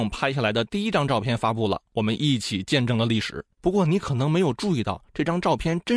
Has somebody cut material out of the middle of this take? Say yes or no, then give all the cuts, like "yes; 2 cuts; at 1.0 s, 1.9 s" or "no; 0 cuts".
yes; 1 cut; at 3.5 s